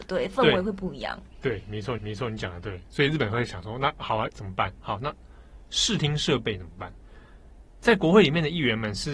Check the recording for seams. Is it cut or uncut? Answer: cut